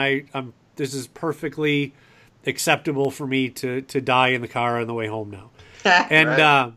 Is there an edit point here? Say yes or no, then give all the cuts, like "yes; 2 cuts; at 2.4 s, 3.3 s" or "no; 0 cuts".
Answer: no; 0 cuts